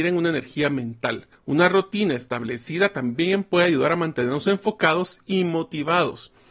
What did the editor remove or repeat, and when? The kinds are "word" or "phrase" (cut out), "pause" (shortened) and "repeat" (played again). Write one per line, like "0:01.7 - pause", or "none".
0:01.3 - pause